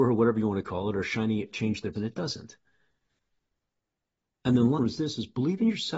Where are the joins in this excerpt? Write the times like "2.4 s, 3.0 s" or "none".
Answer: 1.5 s, 1.9 s, 4.8 s